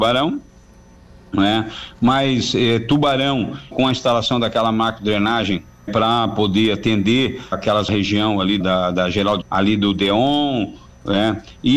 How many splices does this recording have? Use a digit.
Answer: 6